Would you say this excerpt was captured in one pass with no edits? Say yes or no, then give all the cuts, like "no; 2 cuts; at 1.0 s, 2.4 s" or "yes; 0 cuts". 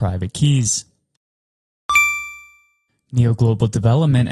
yes; 0 cuts